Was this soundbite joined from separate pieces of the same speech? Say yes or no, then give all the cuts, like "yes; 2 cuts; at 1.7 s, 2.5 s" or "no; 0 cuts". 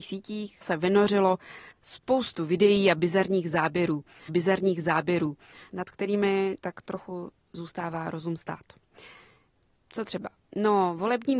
yes; 3 cuts; at 1.7 s, 4.3 s, 6.6 s